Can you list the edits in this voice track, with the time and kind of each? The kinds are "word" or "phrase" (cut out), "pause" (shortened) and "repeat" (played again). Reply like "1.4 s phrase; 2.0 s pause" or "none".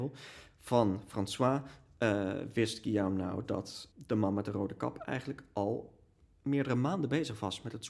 3.9 s word